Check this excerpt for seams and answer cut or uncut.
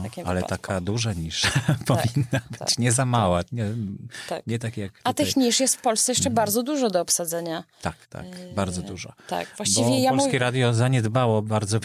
cut